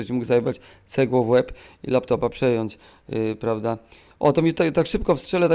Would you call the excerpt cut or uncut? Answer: uncut